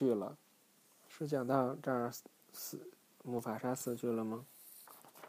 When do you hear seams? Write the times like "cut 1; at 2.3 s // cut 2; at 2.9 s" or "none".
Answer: none